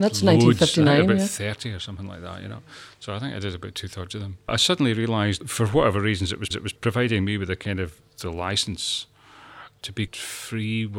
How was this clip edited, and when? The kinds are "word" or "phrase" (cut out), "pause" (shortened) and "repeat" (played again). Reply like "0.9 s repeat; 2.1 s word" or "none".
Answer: 6.5 s repeat; 10.1 s word

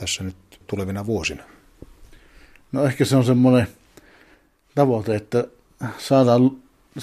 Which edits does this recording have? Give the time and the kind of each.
none

